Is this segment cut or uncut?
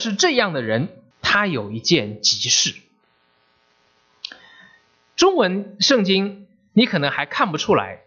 cut